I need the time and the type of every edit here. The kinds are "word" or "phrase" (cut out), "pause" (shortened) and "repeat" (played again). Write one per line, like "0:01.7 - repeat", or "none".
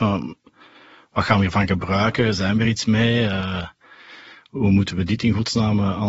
none